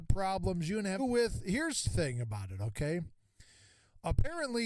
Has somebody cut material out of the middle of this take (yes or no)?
yes